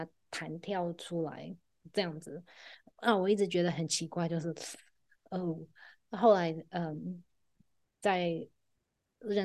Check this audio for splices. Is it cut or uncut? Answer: uncut